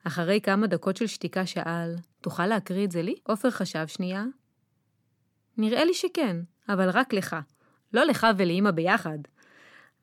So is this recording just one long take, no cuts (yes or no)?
no